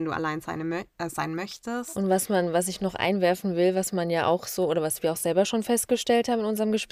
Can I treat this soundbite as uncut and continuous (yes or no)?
yes